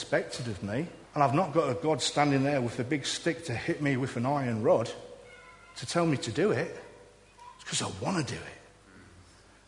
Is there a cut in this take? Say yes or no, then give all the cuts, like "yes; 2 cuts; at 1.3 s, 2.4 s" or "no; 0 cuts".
yes; 1 cut; at 1.1 s